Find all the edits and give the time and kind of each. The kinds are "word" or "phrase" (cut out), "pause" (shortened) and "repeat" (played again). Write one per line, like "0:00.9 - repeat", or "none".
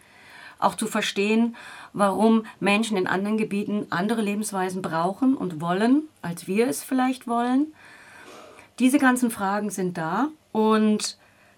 0:06.1 - pause
0:10.4 - pause